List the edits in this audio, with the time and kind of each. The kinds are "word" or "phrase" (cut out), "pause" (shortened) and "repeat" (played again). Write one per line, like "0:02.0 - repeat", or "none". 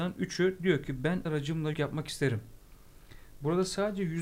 0:01.3 - word
0:01.7 - word